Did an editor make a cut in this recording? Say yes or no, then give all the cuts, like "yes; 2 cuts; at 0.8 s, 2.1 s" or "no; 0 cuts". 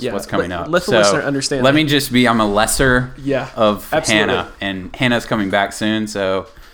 no; 0 cuts